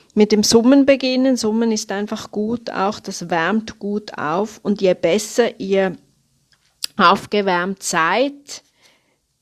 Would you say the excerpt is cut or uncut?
uncut